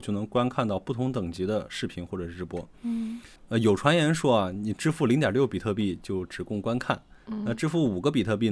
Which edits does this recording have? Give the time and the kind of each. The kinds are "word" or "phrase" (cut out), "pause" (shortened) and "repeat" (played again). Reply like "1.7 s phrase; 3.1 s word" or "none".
3.4 s pause